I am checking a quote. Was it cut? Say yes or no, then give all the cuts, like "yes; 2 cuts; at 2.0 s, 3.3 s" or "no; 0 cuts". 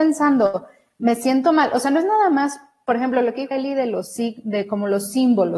yes; 1 cut; at 3.5 s